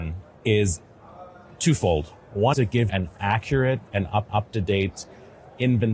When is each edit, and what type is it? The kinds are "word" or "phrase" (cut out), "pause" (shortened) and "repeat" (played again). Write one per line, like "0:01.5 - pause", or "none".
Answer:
0:02.5 - word
0:02.9 - word
0:04.3 - repeat